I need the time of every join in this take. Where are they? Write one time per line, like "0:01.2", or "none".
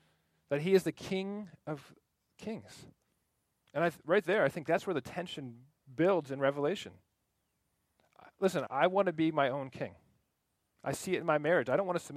0:08.7